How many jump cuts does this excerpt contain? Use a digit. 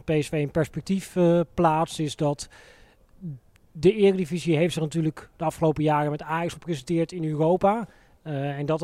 1